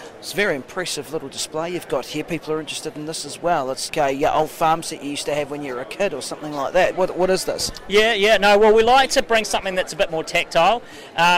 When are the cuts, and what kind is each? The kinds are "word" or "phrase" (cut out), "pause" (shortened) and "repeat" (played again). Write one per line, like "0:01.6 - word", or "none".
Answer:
0:03.9 - word